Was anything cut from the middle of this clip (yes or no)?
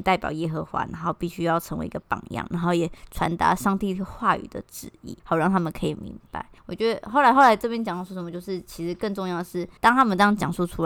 yes